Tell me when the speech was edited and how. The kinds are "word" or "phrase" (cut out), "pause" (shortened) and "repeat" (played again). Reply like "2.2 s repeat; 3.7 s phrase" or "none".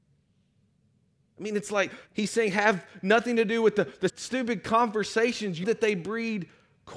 2.1 s pause; 4.1 s word; 5.6 s word